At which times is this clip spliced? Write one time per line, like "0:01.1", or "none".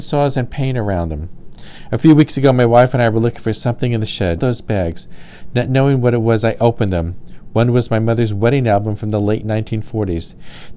0:04.4